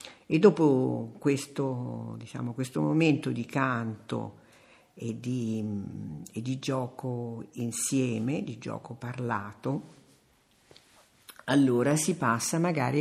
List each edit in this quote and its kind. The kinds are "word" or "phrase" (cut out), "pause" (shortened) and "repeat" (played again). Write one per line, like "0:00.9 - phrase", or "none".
none